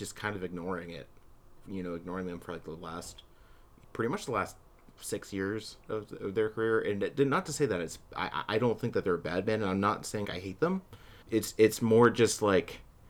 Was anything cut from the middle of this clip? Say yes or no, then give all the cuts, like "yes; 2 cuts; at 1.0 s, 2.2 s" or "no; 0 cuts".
yes; 6 cuts; at 3.8 s, 5.0 s, 5.8 s, 8.0 s, 10.2 s, 11.2 s